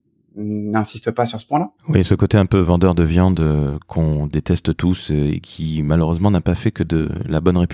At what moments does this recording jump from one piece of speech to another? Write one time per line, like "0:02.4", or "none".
0:01.8